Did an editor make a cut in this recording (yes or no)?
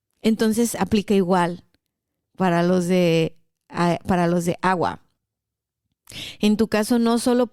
no